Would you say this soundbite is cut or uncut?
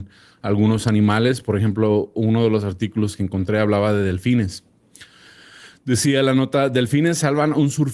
uncut